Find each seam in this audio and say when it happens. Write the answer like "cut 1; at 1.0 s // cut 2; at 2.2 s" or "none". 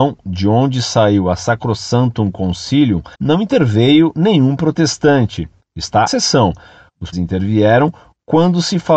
cut 1; at 3.1 s // cut 2; at 6.1 s // cut 3; at 7.1 s